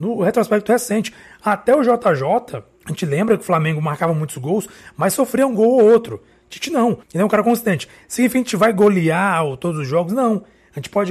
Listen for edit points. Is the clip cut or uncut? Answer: cut